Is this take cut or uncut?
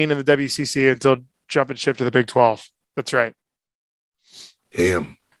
uncut